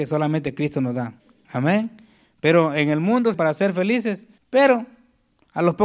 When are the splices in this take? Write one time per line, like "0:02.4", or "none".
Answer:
0:01.2
0:03.3
0:04.4

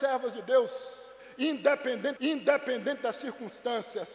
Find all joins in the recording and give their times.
0:02.2

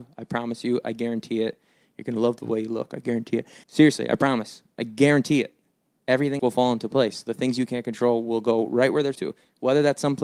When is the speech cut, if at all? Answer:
0:03.6
0:06.4
0:09.1

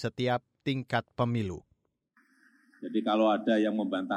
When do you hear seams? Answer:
none

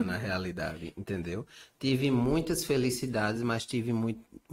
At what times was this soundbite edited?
none

